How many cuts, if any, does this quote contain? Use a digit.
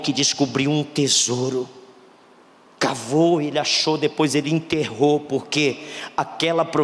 0